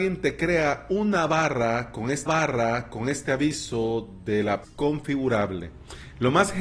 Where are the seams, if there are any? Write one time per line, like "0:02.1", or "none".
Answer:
0:02.3
0:04.6